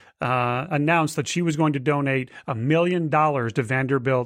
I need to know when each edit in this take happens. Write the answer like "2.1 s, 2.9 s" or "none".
none